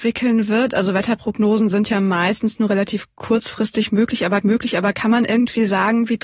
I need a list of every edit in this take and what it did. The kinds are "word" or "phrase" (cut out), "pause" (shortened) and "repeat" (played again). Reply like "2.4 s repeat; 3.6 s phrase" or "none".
4.4 s repeat